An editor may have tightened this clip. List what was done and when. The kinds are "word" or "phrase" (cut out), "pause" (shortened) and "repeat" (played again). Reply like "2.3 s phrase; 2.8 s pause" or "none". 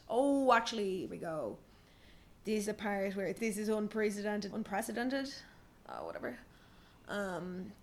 1.1 s word; 2.6 s word; 3.4 s word; 4.5 s word